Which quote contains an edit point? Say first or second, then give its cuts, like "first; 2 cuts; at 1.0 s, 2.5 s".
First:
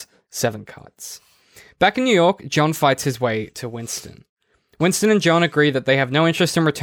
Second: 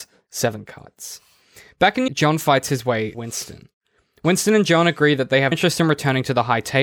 second; 3 cuts; at 2.1 s, 3.1 s, 5.5 s